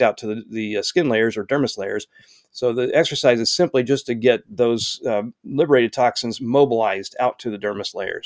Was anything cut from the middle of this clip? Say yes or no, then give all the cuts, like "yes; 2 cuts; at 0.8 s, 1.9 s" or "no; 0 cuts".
no; 0 cuts